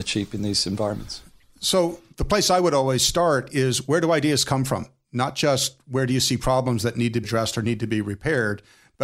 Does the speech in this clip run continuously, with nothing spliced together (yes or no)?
no